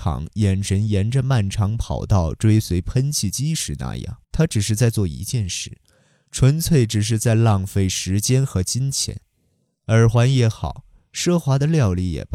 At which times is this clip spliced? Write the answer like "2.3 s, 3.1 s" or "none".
4.2 s